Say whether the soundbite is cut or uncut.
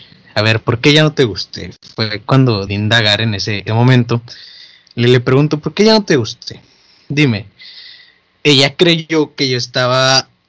cut